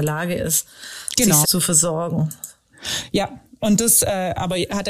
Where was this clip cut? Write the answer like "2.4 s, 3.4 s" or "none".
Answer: 1.4 s